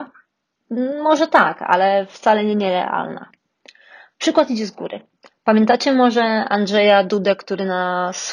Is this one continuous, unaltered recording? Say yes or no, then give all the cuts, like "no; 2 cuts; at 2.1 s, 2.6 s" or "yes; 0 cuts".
yes; 0 cuts